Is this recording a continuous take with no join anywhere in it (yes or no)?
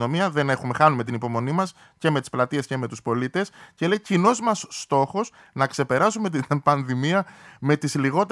yes